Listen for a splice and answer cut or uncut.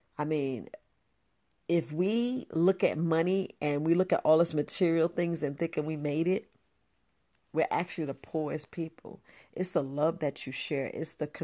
uncut